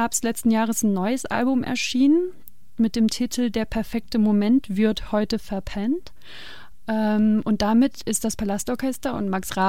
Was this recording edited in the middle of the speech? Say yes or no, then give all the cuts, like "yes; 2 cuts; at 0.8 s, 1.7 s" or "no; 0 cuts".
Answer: no; 0 cuts